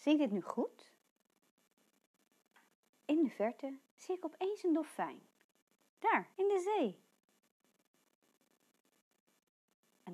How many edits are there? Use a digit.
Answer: 2